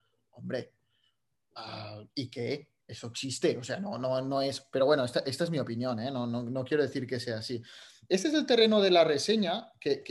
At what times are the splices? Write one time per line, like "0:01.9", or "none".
none